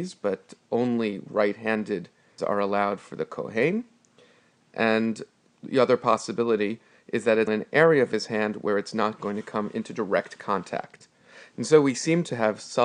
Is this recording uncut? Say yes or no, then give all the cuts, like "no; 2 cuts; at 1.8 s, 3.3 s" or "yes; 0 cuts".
no; 2 cuts; at 2.4 s, 7.5 s